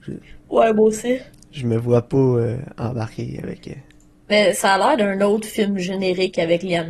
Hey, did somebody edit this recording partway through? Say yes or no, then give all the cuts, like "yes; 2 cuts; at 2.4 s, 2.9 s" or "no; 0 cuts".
no; 0 cuts